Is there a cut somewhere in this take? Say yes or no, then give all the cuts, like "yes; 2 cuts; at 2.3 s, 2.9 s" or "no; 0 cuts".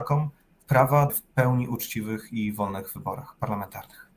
yes; 1 cut; at 1.1 s